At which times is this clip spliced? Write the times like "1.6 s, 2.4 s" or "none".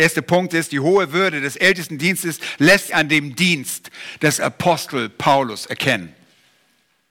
2.9 s